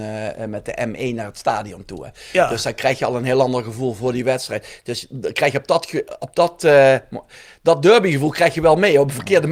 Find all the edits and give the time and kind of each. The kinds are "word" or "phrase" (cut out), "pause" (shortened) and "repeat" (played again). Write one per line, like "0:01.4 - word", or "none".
none